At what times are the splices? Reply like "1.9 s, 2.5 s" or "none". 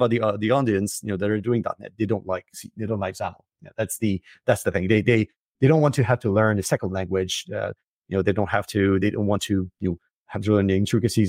none